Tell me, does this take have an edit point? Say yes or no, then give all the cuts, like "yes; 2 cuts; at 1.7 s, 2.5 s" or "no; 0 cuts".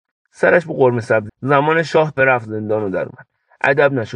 yes; 2 cuts; at 1.3 s, 2.2 s